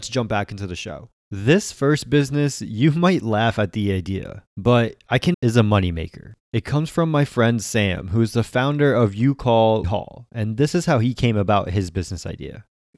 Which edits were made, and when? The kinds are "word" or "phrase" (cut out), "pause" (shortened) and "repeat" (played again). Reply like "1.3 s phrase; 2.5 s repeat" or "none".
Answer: 1.2 s pause; 5.3 s phrase; 9.8 s word